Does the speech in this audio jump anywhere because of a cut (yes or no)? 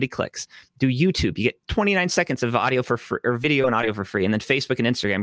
yes